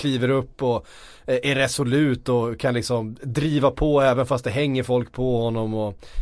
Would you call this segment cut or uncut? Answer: uncut